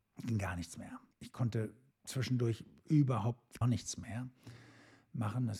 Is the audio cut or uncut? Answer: cut